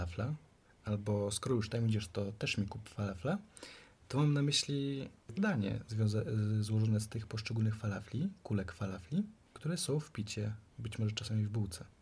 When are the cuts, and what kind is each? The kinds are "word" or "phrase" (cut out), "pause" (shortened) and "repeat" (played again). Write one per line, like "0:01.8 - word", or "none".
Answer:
0:05.4 - word